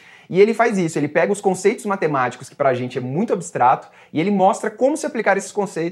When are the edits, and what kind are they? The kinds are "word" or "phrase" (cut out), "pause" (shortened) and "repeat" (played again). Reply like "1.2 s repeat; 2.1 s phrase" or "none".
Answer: none